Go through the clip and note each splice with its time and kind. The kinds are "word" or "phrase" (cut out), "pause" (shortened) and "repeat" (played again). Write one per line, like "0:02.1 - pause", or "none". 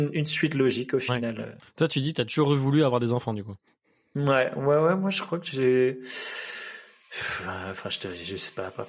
0:03.7 - pause